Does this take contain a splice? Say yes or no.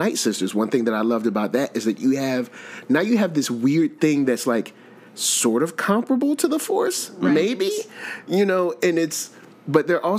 no